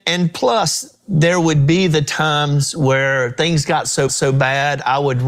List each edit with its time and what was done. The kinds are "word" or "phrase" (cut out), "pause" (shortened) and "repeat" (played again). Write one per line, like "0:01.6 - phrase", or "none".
0:04.1 - repeat

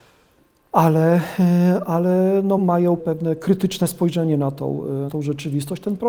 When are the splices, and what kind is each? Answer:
0:02.6 - word
0:03.0 - word
0:05.1 - word

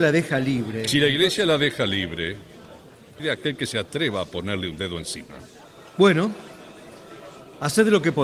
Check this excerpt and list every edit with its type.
0:03.2 - word

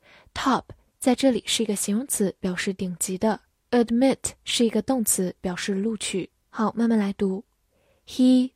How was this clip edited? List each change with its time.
0:03.5 - pause
0:06.4 - pause

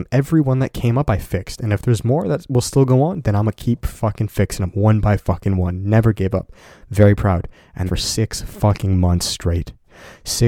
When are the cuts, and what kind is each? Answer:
0:07.9 - phrase

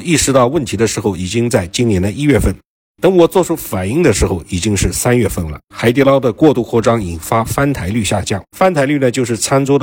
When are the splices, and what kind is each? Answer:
0:05.6 - pause
0:08.5 - pause

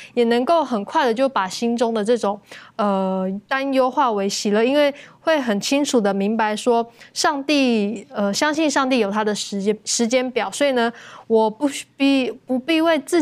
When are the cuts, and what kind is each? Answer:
none

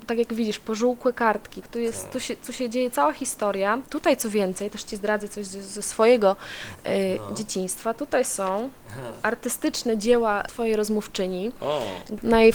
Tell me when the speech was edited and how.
none

